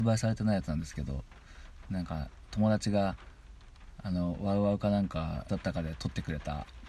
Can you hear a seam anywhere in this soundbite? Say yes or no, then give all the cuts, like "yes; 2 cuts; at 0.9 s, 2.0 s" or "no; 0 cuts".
yes; 1 cut; at 5.5 s